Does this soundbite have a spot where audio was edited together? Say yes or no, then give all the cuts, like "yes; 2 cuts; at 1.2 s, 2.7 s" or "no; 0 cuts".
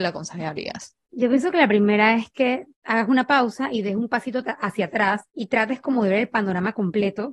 yes; 2 cuts; at 2.7 s, 5.3 s